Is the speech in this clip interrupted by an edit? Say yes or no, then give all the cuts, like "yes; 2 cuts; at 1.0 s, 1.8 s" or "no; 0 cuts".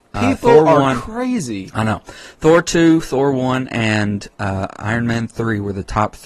no; 0 cuts